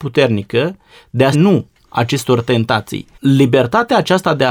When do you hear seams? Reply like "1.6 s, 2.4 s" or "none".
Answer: 1.3 s, 3.1 s